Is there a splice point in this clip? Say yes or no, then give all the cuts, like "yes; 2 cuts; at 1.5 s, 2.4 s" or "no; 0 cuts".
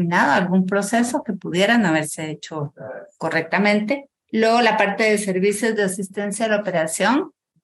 yes; 1 cut; at 4.2 s